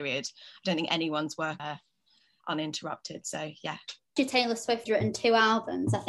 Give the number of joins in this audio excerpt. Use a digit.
3